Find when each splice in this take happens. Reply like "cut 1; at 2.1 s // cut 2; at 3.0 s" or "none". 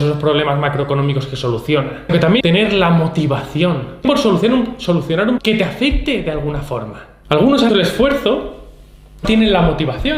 cut 1; at 2.1 s // cut 2; at 2.4 s // cut 3; at 4.0 s // cut 4; at 5.4 s // cut 5; at 7.7 s // cut 6; at 9.2 s